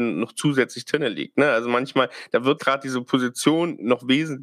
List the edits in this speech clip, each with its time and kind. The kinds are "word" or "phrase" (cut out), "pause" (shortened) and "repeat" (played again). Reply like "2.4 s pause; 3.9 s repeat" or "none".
2.6 s word